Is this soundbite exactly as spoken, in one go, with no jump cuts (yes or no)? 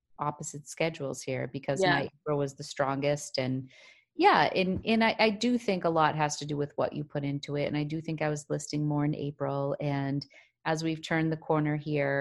yes